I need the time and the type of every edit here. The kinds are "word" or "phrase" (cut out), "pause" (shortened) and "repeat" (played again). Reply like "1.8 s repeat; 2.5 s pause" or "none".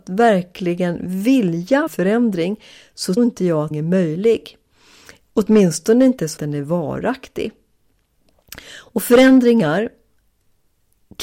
1.9 s word; 3.2 s word; 3.7 s word; 6.4 s word